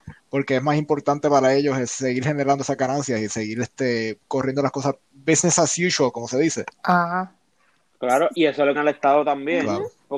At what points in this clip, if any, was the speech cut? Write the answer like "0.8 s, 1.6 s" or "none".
6.7 s, 8.3 s, 8.7 s